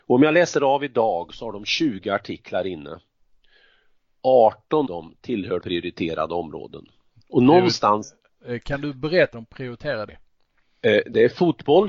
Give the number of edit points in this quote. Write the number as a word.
four